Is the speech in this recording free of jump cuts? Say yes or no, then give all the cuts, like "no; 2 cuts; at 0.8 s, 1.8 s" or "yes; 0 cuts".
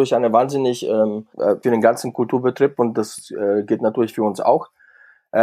no; 2 cuts; at 1.3 s, 1.6 s